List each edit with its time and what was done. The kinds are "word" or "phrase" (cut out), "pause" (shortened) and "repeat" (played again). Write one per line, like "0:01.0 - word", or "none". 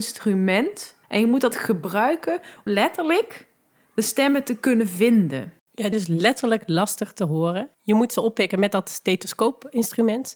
0:01.0 - pause
0:01.5 - word
0:02.7 - word
0:05.6 - pause
0:05.9 - phrase
0:07.7 - pause